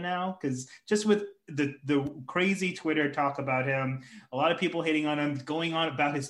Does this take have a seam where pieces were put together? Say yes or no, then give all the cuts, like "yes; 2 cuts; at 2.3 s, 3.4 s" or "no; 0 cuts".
no; 0 cuts